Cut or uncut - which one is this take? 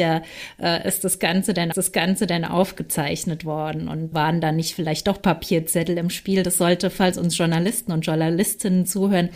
cut